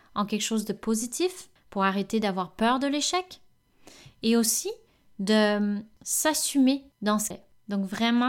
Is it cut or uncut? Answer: cut